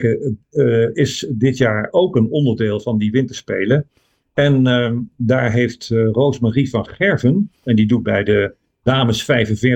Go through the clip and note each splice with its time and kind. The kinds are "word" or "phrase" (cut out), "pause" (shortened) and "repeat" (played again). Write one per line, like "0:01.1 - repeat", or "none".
none